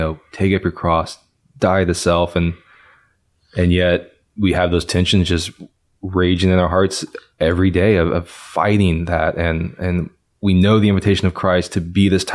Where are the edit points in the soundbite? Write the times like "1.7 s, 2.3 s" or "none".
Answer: none